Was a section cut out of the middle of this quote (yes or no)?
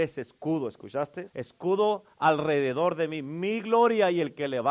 yes